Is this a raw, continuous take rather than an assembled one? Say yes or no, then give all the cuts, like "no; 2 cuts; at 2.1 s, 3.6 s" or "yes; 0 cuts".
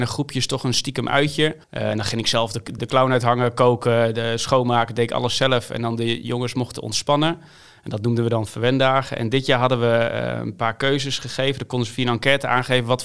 no; 2 cuts; at 1.6 s, 2.8 s